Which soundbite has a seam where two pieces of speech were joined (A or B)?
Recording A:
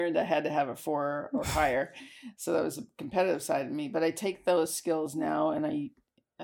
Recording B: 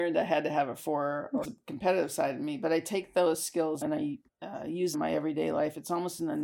B